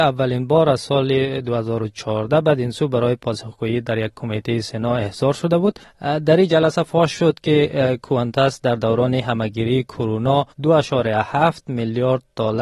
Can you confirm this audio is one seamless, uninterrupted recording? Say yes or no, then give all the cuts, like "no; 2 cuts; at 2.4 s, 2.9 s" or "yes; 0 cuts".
no; 2 cuts; at 5.8 s, 10.5 s